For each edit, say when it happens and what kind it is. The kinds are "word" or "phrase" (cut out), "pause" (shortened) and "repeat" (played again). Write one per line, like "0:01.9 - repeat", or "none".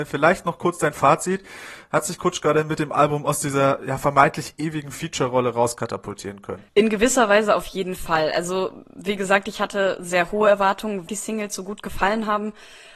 0:06.7 - pause
0:11.1 - phrase